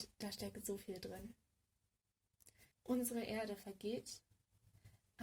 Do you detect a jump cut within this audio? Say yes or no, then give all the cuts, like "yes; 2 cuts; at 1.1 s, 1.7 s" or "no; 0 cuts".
yes; 1 cut; at 2.7 s